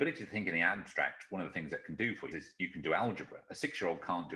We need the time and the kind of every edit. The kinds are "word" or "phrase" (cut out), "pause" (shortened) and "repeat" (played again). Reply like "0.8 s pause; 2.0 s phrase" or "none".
2.3 s phrase